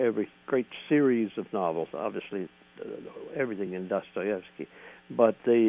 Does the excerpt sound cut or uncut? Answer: uncut